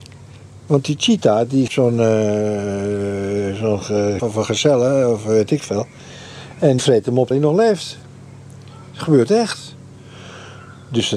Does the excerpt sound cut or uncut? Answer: cut